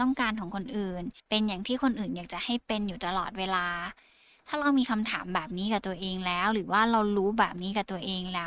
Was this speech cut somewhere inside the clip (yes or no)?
yes